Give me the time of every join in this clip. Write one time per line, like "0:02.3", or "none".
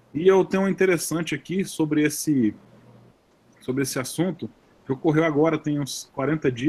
none

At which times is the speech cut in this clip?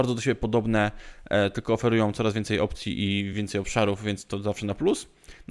none

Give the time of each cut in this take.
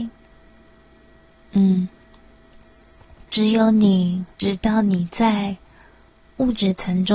0:03.3
0:04.3

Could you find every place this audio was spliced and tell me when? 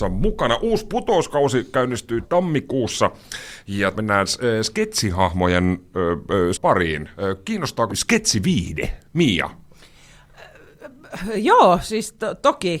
0:02.2
0:03.9
0:06.5
0:07.9

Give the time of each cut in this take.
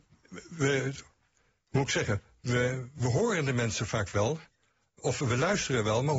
none

